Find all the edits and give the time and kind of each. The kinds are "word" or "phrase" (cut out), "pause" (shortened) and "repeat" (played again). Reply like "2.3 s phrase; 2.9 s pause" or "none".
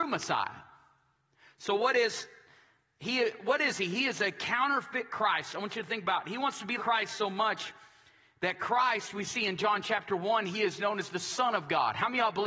6.8 s word